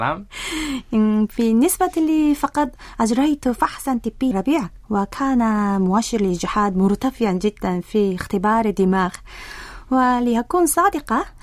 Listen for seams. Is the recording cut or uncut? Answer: cut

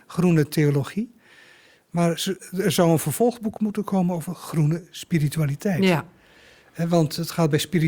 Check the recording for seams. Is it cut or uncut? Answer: uncut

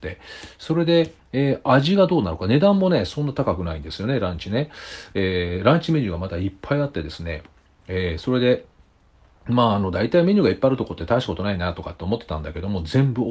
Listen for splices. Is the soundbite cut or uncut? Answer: uncut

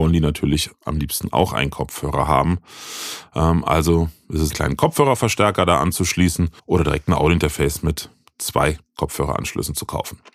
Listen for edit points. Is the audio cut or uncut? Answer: cut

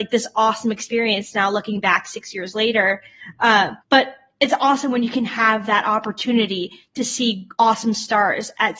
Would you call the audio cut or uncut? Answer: cut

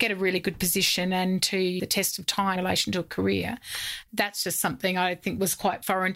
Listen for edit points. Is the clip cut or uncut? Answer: cut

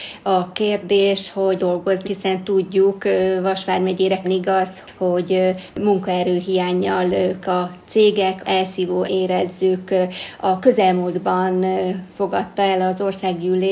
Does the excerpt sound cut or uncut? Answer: cut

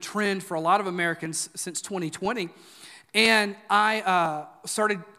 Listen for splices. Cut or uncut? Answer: uncut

